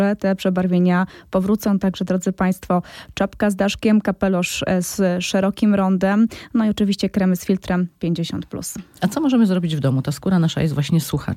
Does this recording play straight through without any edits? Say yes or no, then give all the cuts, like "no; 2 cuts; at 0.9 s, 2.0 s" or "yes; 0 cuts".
yes; 0 cuts